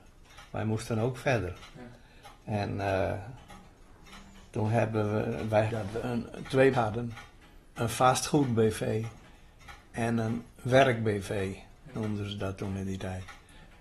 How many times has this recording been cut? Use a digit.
4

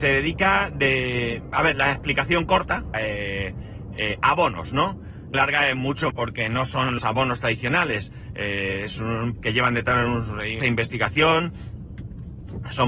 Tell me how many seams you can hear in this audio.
7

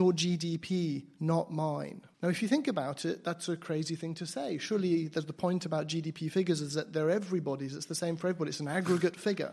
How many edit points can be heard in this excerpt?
1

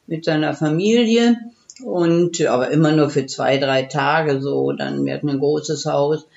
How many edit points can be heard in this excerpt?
0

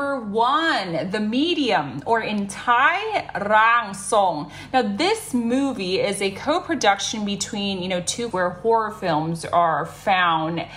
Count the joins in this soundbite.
1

